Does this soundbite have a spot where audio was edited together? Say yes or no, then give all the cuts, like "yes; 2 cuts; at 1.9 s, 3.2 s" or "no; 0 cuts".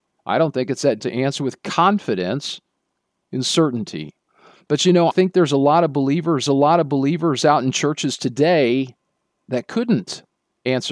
yes; 4 cuts; at 1.0 s, 4.3 s, 5.1 s, 6.5 s